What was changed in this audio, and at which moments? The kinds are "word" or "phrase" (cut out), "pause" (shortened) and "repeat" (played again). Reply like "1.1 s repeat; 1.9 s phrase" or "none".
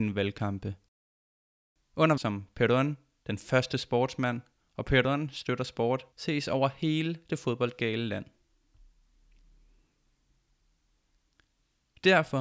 2.2 s phrase; 6.1 s pause